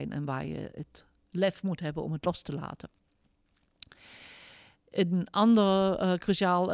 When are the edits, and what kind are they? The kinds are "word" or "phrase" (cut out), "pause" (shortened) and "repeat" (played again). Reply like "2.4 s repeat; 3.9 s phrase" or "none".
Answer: none